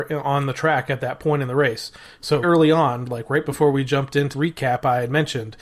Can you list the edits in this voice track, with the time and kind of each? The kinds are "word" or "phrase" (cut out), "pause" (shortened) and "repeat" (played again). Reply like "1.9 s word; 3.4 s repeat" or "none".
2.4 s word; 4.3 s word